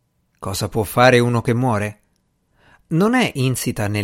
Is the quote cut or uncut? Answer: uncut